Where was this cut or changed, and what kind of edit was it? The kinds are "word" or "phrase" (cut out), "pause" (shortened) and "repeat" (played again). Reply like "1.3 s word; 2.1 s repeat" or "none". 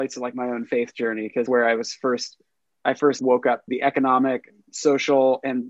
1.5 s word; 3.2 s word; 3.7 s word